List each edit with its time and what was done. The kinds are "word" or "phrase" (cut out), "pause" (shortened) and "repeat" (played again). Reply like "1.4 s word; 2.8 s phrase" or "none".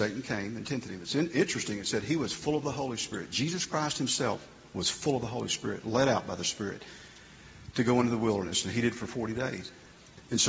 none